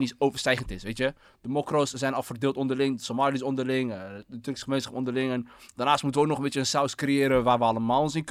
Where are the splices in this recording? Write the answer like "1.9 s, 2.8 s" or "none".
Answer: none